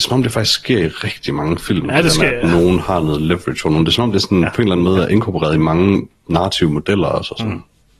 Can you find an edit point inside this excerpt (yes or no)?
no